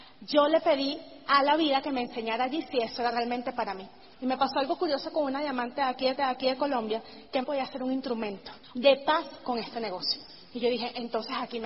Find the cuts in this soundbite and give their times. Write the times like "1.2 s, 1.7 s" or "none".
6.2 s, 7.4 s, 8.6 s